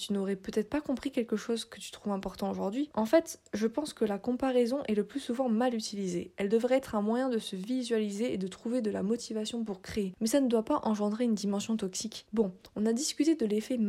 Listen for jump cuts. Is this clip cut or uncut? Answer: uncut